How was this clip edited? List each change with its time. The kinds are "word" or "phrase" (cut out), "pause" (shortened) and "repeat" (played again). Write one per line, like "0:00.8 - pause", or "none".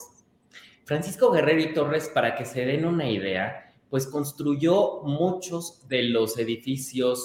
none